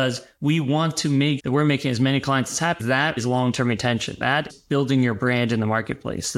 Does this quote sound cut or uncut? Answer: cut